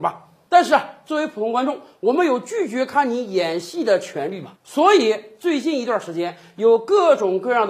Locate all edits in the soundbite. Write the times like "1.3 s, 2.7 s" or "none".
4.6 s